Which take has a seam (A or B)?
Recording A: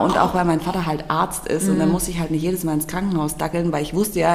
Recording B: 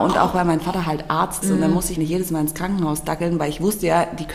B